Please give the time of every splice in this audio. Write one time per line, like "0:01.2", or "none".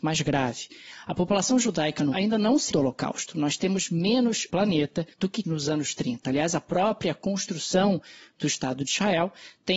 0:02.1
0:02.7
0:04.5
0:05.1
0:05.4